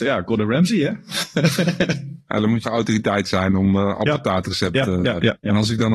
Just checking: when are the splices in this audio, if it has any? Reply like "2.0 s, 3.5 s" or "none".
2.6 s